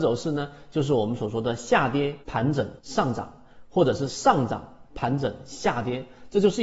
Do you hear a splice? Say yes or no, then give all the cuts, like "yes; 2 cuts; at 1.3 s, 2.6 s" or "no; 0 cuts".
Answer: yes; 2 cuts; at 2.2 s, 2.8 s